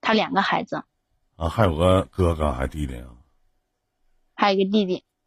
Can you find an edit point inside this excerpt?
no; 0 cuts

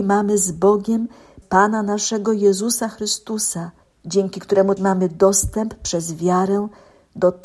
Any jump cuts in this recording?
yes; 3 cuts; at 1.4 s, 3.8 s, 4.8 s

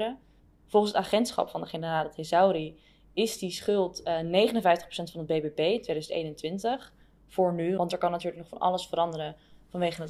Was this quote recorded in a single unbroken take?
yes; 0 cuts

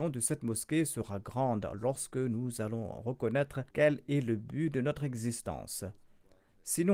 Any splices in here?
yes; 1 cut; at 3.7 s

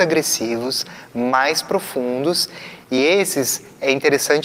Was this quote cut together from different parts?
no; 0 cuts

